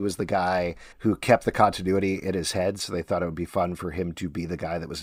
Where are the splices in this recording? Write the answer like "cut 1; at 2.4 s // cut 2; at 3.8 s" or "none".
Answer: cut 1; at 0.9 s